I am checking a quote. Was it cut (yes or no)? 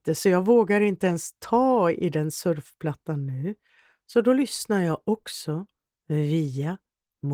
no